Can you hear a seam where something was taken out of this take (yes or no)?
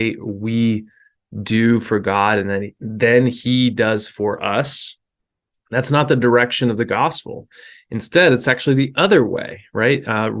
no